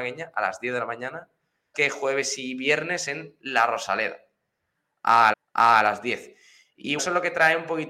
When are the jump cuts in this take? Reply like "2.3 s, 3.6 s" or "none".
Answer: 1.7 s, 5.3 s, 7.0 s